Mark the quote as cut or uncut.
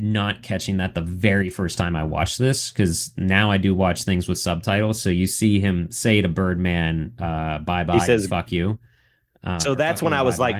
uncut